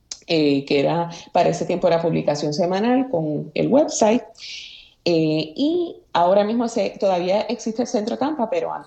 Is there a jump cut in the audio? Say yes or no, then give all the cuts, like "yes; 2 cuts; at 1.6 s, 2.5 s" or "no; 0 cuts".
no; 0 cuts